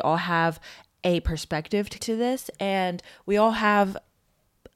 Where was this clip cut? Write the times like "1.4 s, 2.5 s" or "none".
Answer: 2.0 s